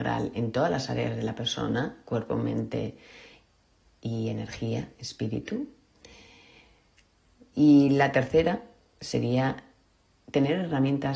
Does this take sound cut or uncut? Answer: uncut